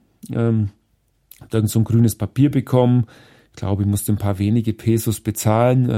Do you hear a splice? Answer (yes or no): no